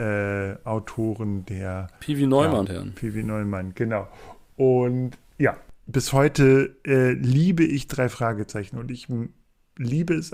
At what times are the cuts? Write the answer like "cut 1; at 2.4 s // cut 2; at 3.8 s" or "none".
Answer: cut 1; at 2.7 s